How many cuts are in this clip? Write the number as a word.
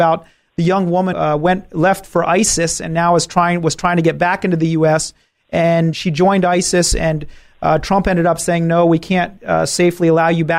two